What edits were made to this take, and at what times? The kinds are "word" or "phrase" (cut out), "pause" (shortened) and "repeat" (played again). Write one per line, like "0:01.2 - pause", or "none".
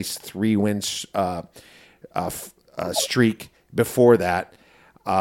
none